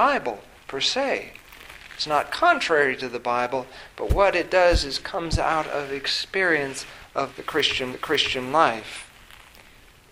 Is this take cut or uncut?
cut